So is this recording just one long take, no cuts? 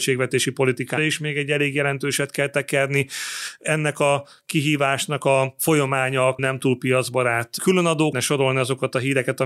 no; 3 cuts; at 1.0 s, 6.4 s, 8.1 s

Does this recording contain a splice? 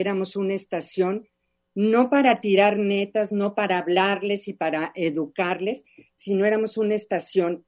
no; 0 cuts

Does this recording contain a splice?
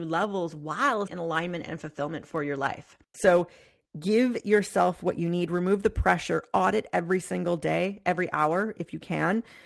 yes; 2 cuts; at 1.1 s, 3.0 s

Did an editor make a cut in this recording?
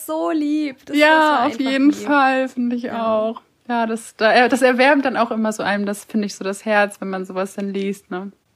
no; 0 cuts

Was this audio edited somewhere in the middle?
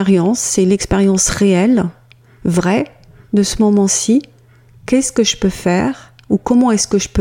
no; 0 cuts

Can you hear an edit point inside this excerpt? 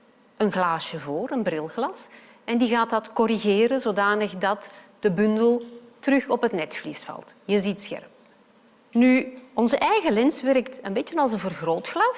no; 0 cuts

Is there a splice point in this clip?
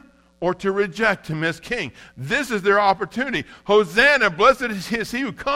no; 0 cuts

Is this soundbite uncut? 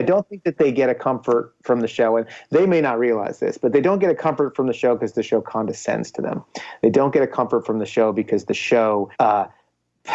no; 1 cut; at 9.1 s

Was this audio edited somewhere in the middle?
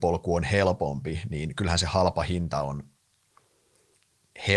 no; 0 cuts

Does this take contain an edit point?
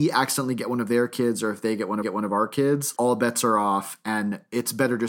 yes; 2 cuts; at 2.0 s, 3.0 s

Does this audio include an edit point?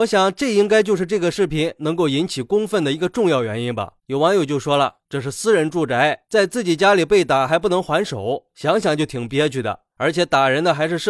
yes; 1 cut; at 4.0 s

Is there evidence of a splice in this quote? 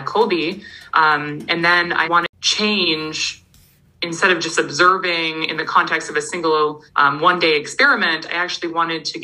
yes; 2 cuts; at 2.0 s, 6.9 s

